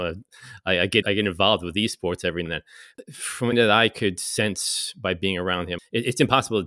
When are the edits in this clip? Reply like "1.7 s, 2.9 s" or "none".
1.0 s, 2.5 s, 3.5 s